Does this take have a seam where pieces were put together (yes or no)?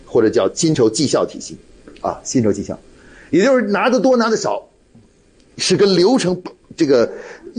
yes